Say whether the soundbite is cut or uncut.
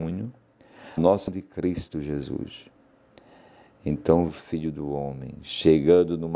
cut